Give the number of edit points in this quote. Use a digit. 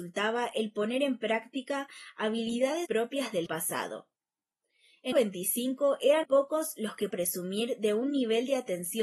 5